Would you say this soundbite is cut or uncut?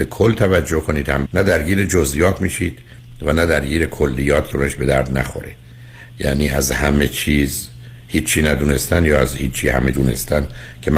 cut